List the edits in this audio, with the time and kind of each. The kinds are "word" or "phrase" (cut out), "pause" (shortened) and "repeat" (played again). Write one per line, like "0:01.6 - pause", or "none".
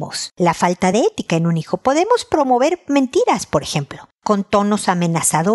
none

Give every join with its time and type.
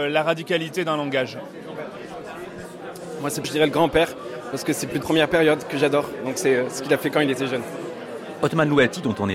0:03.4 - word
0:05.0 - word

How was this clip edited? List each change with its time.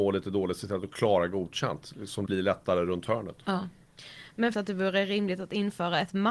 0:02.3 - word
0:03.4 - pause
0:04.5 - phrase

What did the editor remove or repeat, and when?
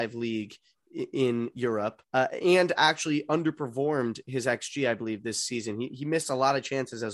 0:02.0 - pause

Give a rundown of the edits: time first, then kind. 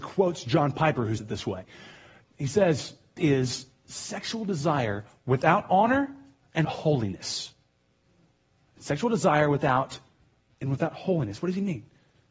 0:01.2 - word
0:03.2 - word
0:06.6 - word
0:10.5 - word

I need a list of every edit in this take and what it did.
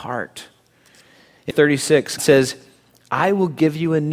0:01.5 - word
0:02.2 - word

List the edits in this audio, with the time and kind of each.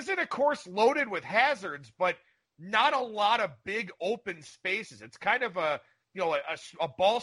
none

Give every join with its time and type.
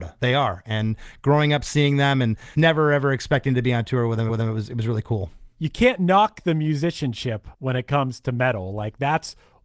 0:02.5 - word
0:04.3 - repeat
0:07.5 - pause

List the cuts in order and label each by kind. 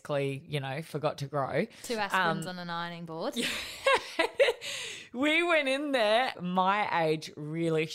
none

